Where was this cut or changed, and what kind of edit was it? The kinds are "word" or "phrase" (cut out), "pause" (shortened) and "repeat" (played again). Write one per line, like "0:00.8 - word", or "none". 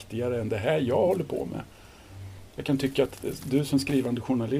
none